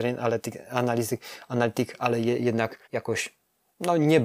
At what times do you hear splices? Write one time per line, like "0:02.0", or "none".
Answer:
0:02.8